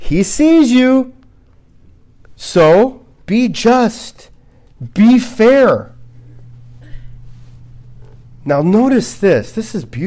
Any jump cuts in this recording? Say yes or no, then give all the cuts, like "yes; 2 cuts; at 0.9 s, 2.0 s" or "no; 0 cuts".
yes; 2 cuts; at 3.1 s, 8.2 s